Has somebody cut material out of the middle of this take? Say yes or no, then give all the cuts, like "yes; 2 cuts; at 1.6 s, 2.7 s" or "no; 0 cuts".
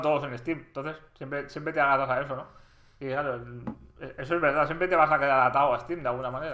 no; 0 cuts